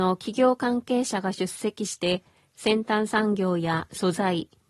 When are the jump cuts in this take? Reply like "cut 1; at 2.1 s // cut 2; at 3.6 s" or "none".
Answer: none